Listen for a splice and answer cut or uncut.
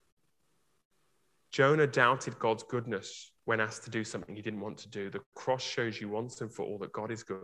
cut